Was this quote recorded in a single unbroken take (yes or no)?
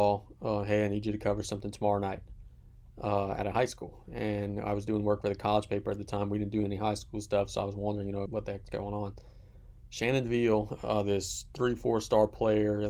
no